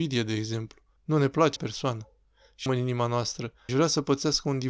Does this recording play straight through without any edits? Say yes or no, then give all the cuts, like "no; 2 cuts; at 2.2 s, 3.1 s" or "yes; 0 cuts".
no; 4 cuts; at 1.0 s, 1.6 s, 2.7 s, 3.7 s